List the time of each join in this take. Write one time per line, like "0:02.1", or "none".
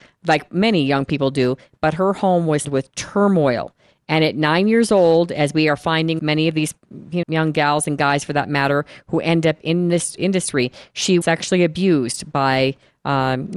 0:02.6
0:06.2
0:07.2
0:10.2
0:11.2